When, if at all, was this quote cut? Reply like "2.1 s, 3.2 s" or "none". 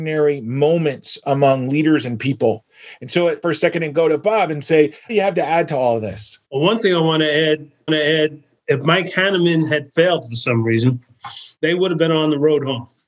3.4 s, 5.1 s, 6.4 s, 7.9 s, 11.6 s